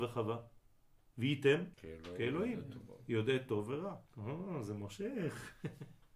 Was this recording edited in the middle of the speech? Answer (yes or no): yes